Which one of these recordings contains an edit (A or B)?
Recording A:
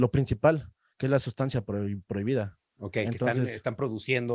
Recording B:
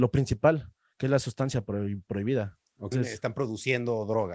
B